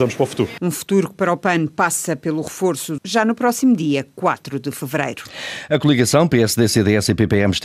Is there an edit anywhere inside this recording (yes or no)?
yes